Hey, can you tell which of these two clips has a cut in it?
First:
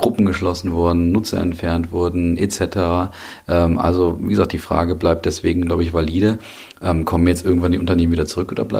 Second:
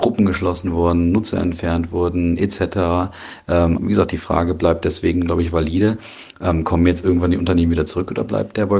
second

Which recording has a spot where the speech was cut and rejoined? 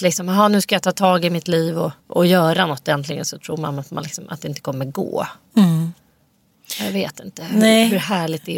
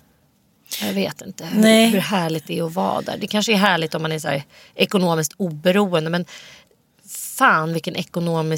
first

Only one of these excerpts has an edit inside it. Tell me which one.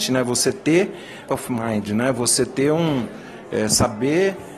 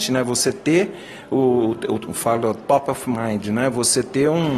first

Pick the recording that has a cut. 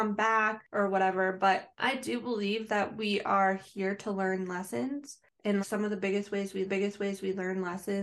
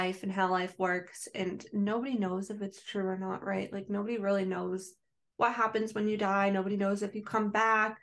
first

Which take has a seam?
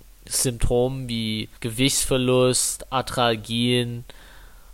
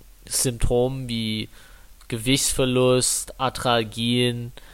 first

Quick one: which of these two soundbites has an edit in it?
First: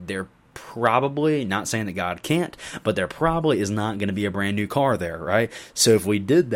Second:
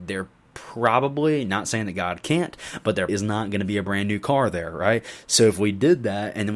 second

